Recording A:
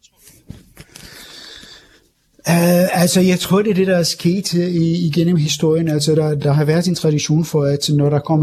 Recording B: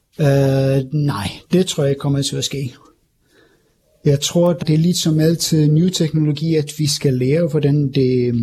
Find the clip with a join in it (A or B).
B